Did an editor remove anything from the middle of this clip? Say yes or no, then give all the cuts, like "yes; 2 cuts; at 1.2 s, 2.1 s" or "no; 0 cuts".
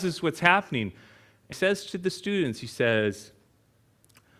yes; 1 cut; at 1.5 s